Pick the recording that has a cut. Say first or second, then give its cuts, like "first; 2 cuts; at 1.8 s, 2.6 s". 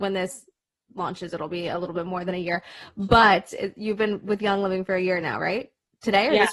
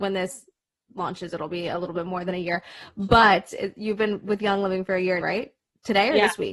second; 1 cut; at 5.2 s